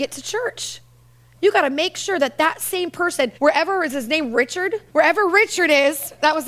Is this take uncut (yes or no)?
no